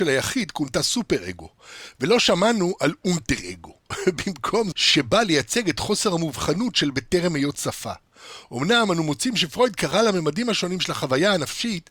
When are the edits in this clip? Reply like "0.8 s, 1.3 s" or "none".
4.7 s